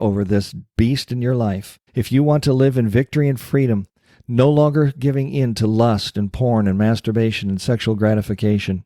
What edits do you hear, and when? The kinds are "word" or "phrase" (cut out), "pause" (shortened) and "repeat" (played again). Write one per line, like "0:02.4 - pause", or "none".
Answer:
0:01.9 - pause